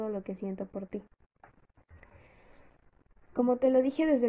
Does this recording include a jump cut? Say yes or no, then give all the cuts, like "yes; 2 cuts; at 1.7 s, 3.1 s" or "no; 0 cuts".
no; 0 cuts